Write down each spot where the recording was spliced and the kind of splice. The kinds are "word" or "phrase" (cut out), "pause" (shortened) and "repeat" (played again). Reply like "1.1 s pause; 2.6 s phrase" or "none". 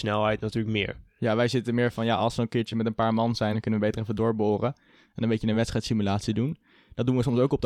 none